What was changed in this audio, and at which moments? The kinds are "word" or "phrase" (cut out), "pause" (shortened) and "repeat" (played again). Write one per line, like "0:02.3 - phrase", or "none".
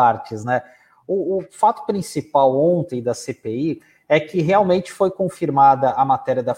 none